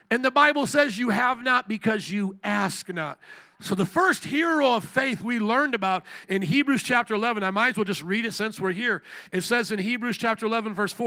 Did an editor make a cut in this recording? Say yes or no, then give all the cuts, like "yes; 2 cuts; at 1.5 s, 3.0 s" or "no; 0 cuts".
no; 0 cuts